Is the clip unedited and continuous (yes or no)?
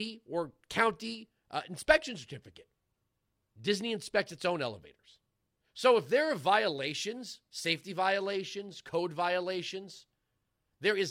yes